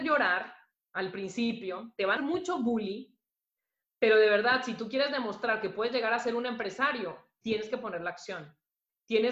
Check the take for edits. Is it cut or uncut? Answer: cut